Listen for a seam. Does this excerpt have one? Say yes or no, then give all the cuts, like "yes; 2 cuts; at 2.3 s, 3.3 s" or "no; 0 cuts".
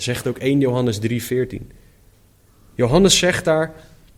no; 0 cuts